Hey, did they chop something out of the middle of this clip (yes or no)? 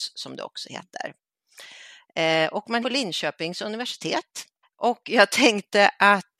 yes